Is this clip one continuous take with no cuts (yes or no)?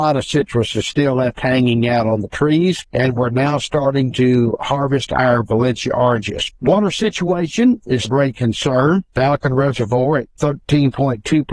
no